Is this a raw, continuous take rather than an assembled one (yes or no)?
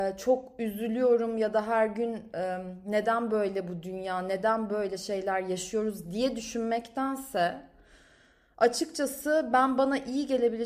yes